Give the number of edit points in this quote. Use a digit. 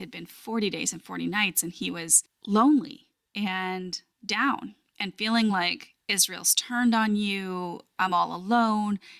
0